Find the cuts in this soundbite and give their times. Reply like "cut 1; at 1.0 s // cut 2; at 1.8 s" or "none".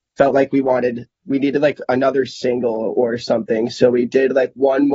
none

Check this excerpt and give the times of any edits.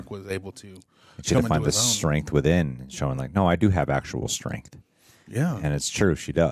none

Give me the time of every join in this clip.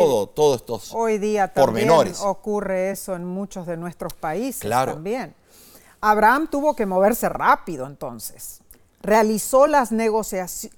none

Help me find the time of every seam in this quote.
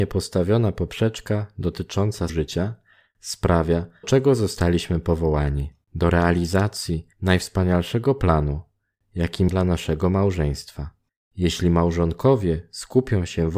cut 1; at 2.3 s // cut 2; at 4.0 s // cut 3; at 5.8 s // cut 4; at 7.1 s // cut 5; at 9.5 s // cut 6; at 11.1 s

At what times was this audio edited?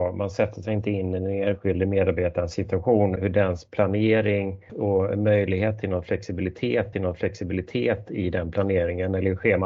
cut 1; at 3.2 s // cut 2; at 4.7 s // cut 3; at 6.9 s

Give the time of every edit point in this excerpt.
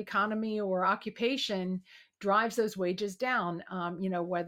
none

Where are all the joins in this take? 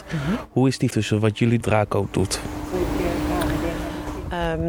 cut 1; at 0.9 s // cut 2; at 1.6 s

